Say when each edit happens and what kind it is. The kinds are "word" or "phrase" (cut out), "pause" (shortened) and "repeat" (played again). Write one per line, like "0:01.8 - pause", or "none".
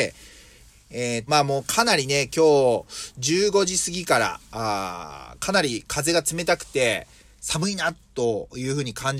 0:01.3 - word